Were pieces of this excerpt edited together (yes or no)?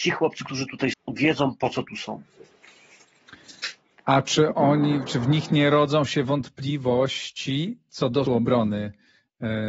yes